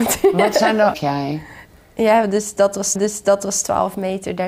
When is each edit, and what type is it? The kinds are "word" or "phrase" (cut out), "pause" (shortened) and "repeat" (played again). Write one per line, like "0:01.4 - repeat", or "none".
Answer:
0:00.9 - phrase
0:03.0 - repeat